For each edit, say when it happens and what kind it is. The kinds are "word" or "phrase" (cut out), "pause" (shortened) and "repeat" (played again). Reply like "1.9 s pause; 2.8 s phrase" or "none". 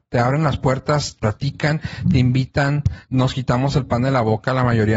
1.2 s word; 3.1 s pause